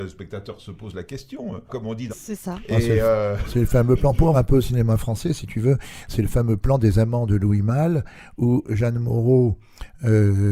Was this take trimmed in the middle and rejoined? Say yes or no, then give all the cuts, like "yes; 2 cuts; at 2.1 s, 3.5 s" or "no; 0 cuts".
yes; 3 cuts; at 1.7 s, 2.1 s, 4.3 s